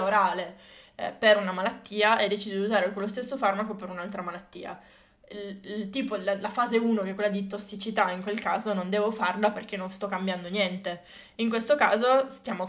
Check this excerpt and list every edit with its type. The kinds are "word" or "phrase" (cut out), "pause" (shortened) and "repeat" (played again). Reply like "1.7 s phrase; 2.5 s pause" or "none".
none